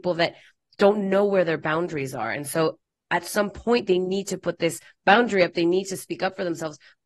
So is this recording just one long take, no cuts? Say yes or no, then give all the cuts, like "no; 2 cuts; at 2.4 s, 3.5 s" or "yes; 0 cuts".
yes; 0 cuts